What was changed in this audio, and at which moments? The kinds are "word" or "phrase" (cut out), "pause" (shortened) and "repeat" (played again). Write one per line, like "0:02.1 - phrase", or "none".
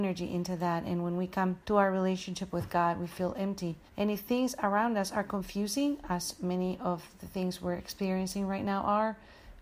0:01.6 - pause
0:03.9 - pause